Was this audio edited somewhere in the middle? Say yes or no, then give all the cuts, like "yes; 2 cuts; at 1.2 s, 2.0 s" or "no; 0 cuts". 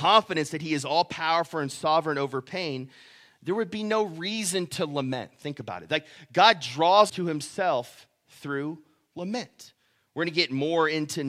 yes; 1 cut; at 7.1 s